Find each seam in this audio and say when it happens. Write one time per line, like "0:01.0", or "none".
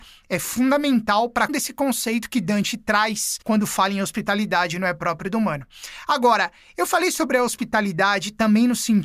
0:01.5
0:03.4